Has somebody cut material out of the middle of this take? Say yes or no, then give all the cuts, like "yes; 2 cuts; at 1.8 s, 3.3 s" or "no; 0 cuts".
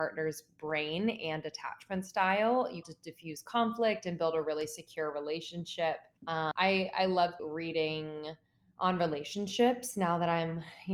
yes; 4 cuts; at 2.8 s, 6.2 s, 7.4 s, 8.4 s